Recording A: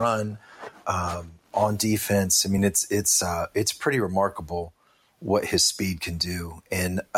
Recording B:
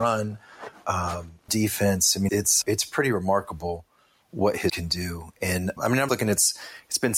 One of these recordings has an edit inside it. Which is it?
B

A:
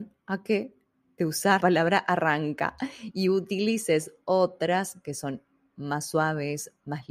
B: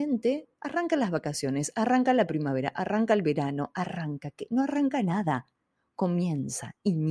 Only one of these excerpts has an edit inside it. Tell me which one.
A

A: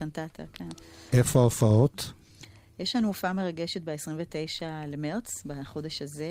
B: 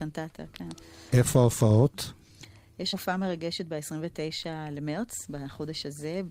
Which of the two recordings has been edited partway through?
B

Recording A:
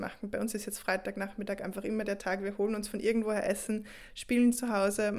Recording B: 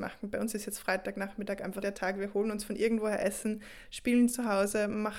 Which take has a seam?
B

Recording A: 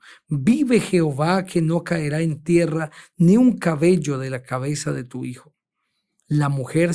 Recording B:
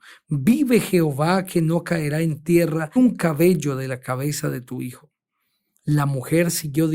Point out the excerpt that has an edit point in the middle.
B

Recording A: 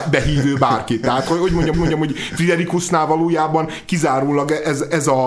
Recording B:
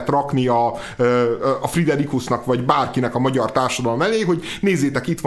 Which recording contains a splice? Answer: A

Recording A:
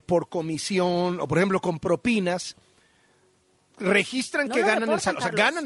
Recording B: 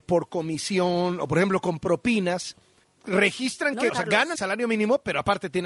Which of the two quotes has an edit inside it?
B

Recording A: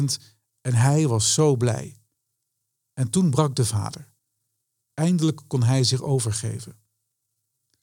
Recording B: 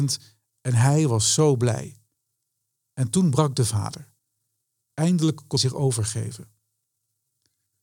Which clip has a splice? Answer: B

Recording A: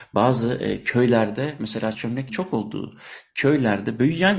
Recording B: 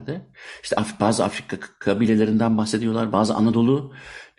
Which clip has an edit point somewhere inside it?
A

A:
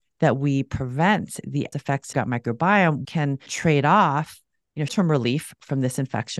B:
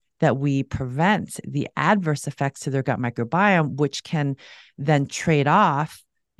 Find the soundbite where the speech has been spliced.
A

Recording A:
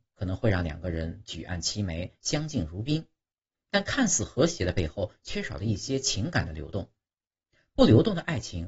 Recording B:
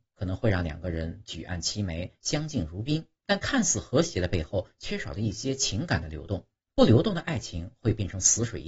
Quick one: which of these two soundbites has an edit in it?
B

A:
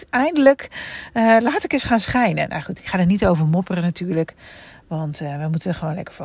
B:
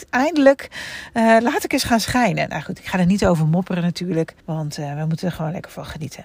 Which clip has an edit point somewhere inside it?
B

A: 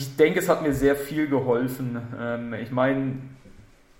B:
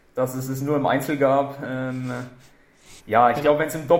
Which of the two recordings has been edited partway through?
B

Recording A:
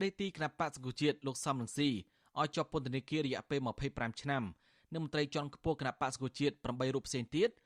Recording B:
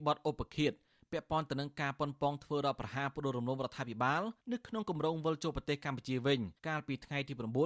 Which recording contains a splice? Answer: B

